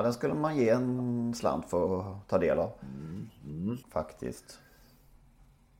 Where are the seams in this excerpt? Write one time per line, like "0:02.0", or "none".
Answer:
0:03.8